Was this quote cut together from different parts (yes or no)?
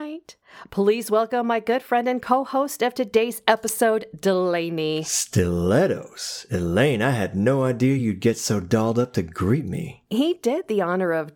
no